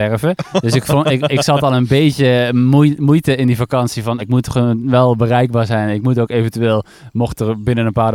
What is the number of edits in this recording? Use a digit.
2